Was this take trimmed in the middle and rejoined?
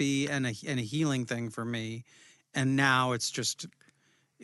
no; 0 cuts

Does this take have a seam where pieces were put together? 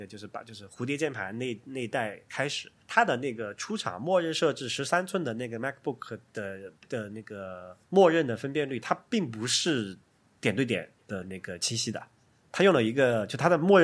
yes; 4 cuts; at 2.8 s, 6.8 s, 7.8 s, 10.1 s

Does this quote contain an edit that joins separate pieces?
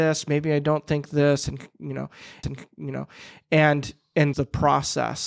yes; 2 cuts; at 2.4 s, 4.3 s

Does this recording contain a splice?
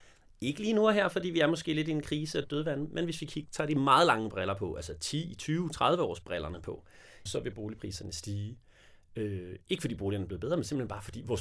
yes; 1 cut; at 7.3 s

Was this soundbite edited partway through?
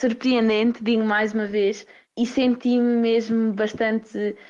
no; 0 cuts

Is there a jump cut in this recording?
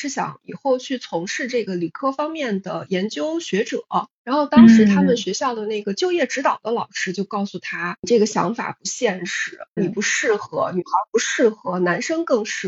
yes; 1 cut; at 9.8 s

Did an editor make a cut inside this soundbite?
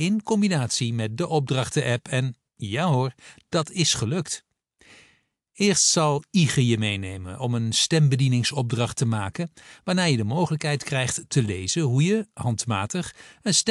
no; 0 cuts

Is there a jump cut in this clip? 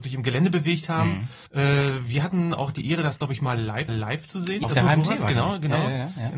yes; 3 cuts; at 1.5 s, 3.9 s, 4.6 s

